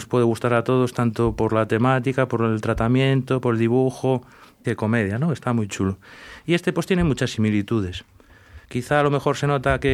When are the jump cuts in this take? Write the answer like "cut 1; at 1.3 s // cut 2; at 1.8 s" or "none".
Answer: cut 1; at 4.6 s // cut 2; at 8.6 s